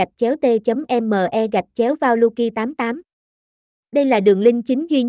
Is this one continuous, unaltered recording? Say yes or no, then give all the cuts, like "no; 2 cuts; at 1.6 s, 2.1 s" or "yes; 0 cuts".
yes; 0 cuts